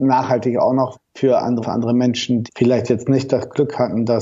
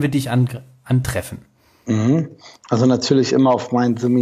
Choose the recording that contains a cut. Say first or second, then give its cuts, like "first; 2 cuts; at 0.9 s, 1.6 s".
first; 3 cuts; at 0.9 s, 1.6 s, 2.5 s